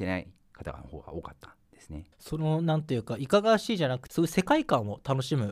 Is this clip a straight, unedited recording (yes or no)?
no